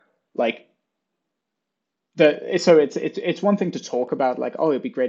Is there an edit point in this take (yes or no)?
no